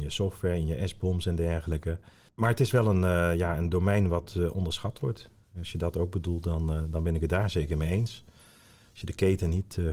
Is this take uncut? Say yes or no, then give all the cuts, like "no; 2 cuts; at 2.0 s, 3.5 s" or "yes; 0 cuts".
yes; 0 cuts